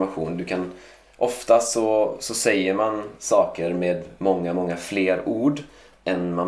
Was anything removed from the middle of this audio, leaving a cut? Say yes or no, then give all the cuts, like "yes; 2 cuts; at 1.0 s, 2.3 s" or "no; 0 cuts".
no; 0 cuts